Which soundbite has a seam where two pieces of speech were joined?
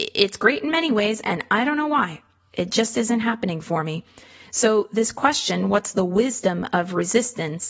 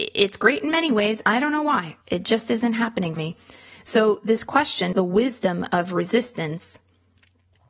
second; 4 cuts; at 1.2 s, 2.0 s, 3.2 s, 4.9 s

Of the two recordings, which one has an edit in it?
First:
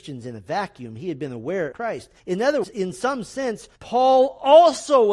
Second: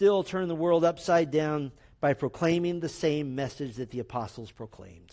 first; 4 cuts; at 1.7 s, 2.2 s, 2.6 s, 3.8 s

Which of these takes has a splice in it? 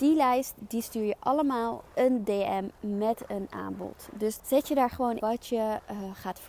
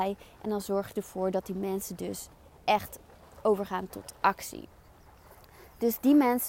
first; 3 cuts; at 1.9 s, 4.4 s, 5.2 s

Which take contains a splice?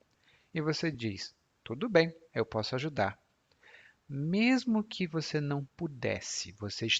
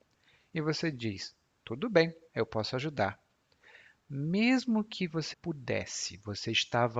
second; 1 cut; at 5.3 s

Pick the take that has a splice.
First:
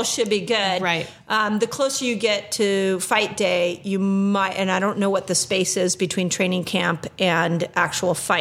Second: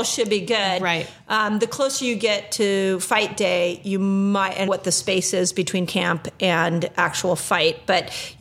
second; 2 cuts; at 4.7 s, 5.9 s

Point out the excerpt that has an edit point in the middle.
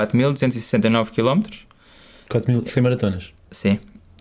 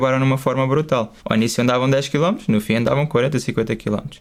second; 1 cut; at 1.2 s

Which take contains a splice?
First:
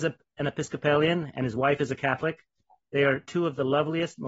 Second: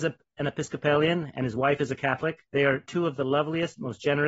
second; 1 cut; at 2.5 s

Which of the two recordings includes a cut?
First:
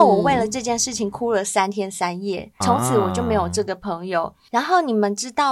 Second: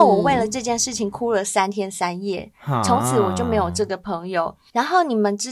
first; 1 cut; at 2.6 s

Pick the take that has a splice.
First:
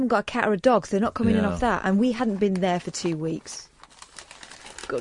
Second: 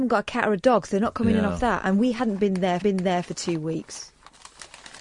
second; 1 cut; at 2.8 s

